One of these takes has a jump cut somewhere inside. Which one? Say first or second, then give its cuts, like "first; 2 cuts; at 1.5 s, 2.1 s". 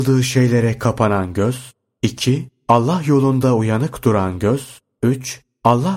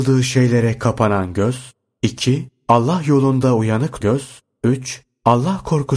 second; 1 cut; at 4.0 s